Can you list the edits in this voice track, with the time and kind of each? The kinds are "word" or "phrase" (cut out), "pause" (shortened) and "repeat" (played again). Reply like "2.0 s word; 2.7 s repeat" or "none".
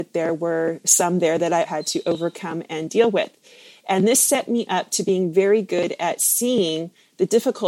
1.6 s word

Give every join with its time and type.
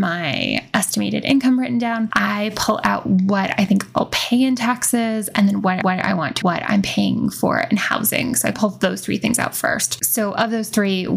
5.8 s repeat; 6.4 s phrase; 8.5 s word

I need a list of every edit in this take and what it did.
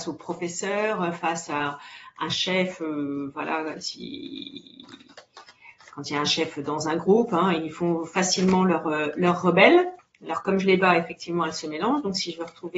10.0 s pause

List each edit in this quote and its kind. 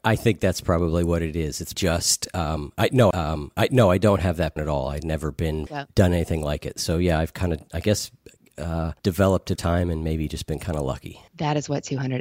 1.7 s word; 3.1 s repeat; 4.6 s word; 5.7 s word; 9.0 s pause; 9.6 s word; 11.3 s pause

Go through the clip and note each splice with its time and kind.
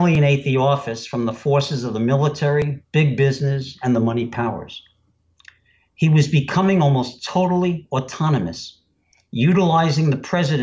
none

